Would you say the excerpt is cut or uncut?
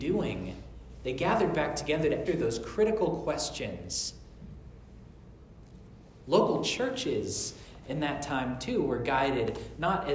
cut